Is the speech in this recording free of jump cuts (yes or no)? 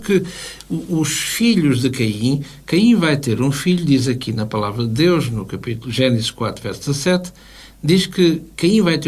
yes